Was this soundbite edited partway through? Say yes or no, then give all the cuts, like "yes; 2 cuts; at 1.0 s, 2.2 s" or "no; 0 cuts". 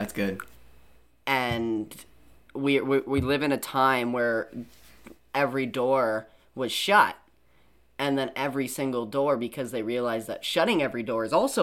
no; 0 cuts